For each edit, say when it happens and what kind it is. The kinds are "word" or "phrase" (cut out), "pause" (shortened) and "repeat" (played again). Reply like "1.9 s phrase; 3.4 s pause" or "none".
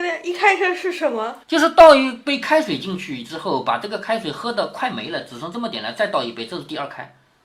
1.4 s pause